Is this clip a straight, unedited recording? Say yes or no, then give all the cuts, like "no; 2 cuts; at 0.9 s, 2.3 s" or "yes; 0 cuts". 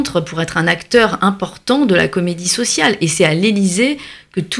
yes; 0 cuts